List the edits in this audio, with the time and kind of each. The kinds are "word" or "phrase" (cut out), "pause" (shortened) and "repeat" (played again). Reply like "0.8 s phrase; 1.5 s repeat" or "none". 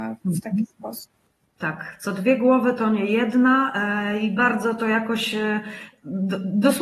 1.3 s pause

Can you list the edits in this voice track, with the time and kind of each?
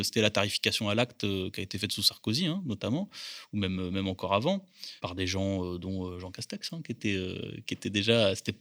5.0 s pause

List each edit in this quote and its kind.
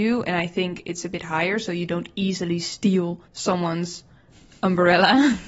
3.3 s pause

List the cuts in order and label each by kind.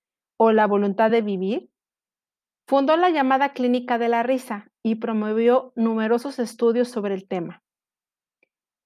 none

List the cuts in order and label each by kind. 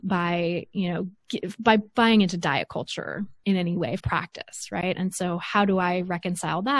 1.2 s pause; 4.0 s phrase

